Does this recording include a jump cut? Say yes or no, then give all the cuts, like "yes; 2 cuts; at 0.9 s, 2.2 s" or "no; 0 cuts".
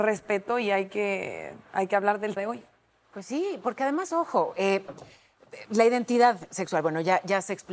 yes; 1 cut; at 2.4 s